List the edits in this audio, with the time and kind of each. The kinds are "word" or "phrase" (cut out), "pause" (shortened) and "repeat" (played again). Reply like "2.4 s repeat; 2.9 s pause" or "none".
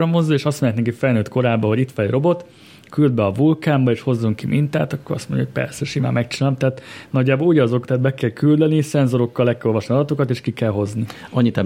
none